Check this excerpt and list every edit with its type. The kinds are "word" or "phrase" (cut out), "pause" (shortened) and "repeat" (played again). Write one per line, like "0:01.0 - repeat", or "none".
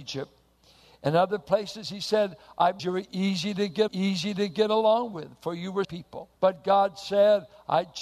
0:02.8 - phrase
0:03.9 - repeat
0:05.8 - phrase
0:06.4 - pause